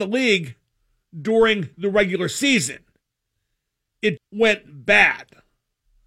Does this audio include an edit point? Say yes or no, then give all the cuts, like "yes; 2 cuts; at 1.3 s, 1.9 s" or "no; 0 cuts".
yes; 2 cuts; at 1.7 s, 4.2 s